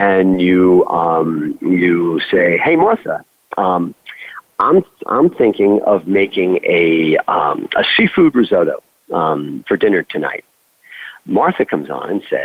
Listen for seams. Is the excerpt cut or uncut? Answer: uncut